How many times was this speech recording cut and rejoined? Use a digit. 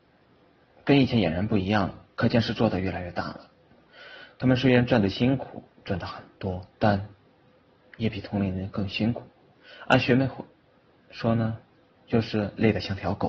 4